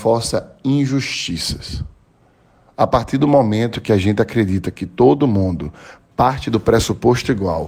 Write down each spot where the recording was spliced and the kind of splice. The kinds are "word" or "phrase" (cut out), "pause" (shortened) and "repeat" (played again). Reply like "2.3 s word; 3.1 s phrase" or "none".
none